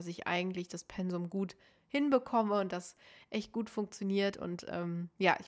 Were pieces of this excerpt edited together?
no; 0 cuts

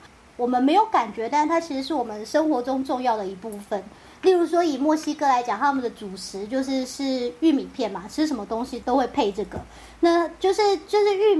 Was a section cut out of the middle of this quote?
no; 0 cuts

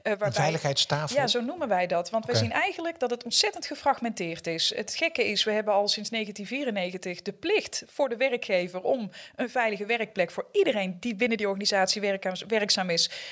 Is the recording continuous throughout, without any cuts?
yes; 0 cuts

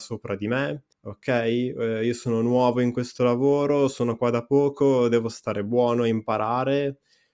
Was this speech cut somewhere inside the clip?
yes; 1 cut; at 0.9 s

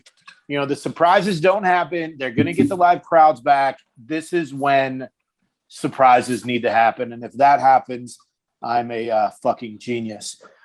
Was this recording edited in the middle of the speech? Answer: no; 0 cuts

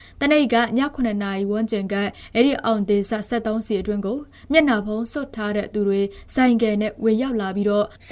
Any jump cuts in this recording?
no; 0 cuts

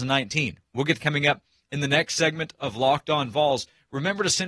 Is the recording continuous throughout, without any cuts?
no; 1 cut; at 1.0 s

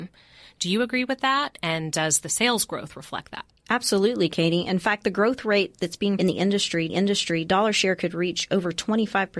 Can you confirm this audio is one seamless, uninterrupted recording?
no; 3 cuts; at 3.5 s, 6.2 s, 6.9 s

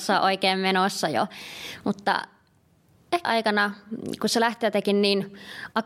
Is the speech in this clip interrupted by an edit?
yes; 1 cut; at 3.2 s

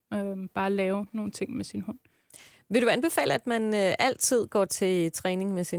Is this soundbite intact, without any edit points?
yes; 0 cuts

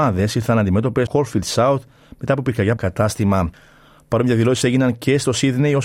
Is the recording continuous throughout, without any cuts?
no; 2 cuts; at 1.1 s, 2.8 s

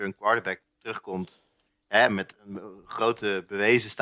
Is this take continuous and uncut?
yes; 0 cuts

